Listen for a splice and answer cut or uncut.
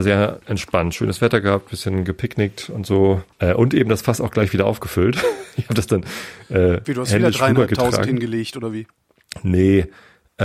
cut